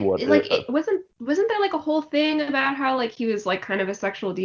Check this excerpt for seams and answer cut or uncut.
uncut